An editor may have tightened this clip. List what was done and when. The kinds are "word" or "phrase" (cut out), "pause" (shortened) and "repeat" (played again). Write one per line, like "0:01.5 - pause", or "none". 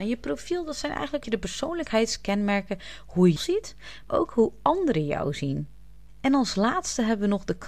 0:01.2 - word
0:03.4 - word
0:04.1 - word